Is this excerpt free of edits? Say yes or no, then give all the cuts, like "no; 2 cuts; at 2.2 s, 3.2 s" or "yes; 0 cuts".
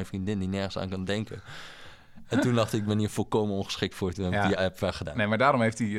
yes; 0 cuts